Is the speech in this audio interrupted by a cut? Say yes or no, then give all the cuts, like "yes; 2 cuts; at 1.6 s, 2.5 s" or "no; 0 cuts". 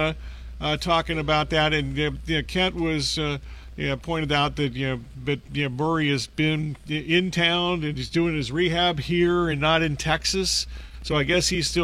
no; 0 cuts